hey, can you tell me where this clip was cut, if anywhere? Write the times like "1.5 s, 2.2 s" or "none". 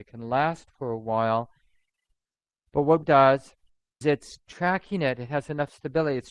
3.0 s, 4.0 s